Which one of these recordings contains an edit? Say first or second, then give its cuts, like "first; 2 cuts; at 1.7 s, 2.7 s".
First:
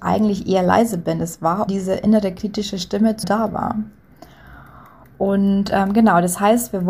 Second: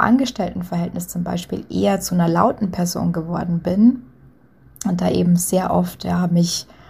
first; 2 cuts; at 1.7 s, 3.2 s